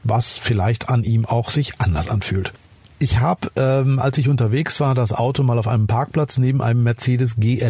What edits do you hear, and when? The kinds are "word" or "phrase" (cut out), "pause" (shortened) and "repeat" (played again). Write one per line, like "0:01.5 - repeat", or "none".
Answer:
none